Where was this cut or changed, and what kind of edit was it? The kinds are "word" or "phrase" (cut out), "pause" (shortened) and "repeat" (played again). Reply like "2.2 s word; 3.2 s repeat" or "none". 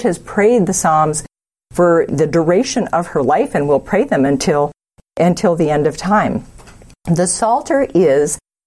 none